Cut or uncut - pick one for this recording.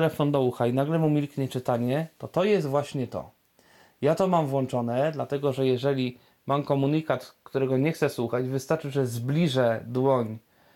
uncut